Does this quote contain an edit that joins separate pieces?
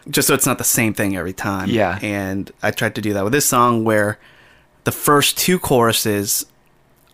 no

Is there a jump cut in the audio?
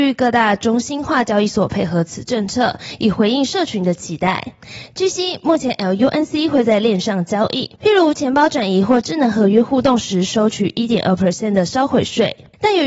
yes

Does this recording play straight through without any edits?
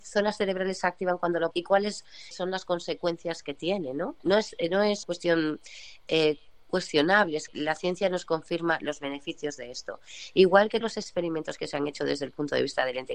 no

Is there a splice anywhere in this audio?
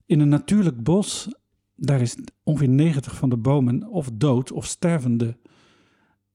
no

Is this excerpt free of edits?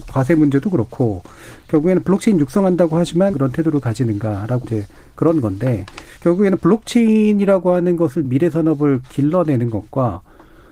no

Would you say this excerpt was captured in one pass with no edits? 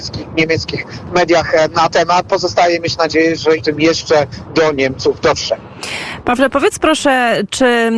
no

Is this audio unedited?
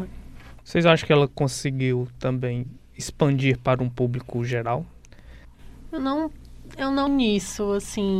no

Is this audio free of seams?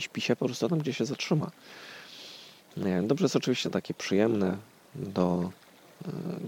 no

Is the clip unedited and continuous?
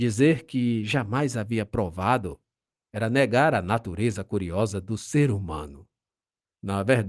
yes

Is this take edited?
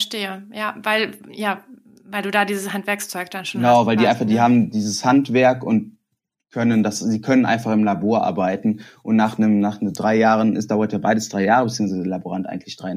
no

